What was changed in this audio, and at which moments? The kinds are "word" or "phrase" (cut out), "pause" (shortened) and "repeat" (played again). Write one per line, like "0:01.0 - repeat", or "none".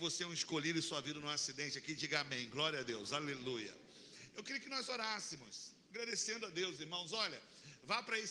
none